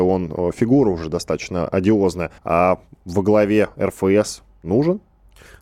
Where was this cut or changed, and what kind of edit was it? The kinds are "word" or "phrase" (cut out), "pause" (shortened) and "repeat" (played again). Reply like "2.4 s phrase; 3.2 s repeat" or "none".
2.4 s pause